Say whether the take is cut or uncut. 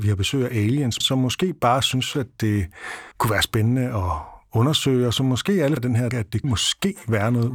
cut